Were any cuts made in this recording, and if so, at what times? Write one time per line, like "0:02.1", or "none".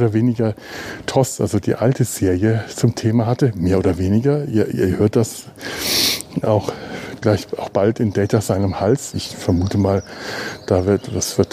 0:06.4